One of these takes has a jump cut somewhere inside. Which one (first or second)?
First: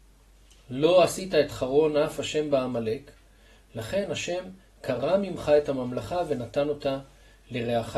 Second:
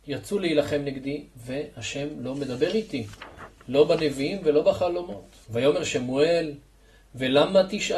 second